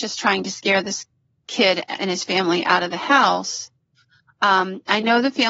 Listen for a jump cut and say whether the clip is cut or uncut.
uncut